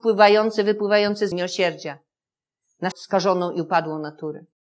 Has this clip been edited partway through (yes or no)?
yes